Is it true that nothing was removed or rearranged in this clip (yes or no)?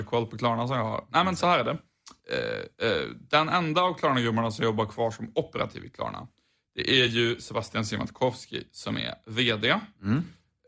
yes